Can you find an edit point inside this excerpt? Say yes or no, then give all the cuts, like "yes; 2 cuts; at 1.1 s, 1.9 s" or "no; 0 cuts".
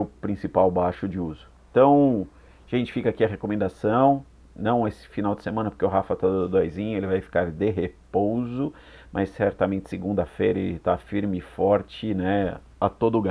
no; 0 cuts